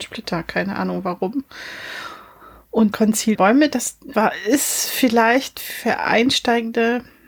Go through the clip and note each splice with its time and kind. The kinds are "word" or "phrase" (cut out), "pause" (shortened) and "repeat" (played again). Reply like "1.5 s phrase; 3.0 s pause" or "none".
2.9 s word; 3.3 s word; 4.1 s word